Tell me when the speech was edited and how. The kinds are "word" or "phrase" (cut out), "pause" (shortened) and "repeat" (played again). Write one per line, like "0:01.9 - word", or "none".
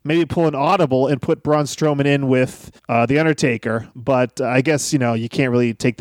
0:02.8 - pause